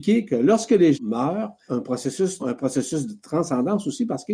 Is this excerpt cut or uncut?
cut